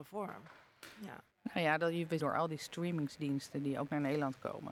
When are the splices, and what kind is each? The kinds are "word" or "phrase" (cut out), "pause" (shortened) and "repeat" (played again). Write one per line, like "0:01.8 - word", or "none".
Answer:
0:01.3 - pause
0:02.2 - phrase